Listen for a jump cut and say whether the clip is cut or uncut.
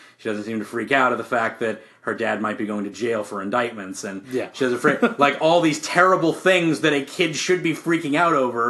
uncut